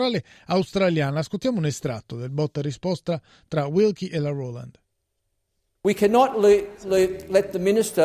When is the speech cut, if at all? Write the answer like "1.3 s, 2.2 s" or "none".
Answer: none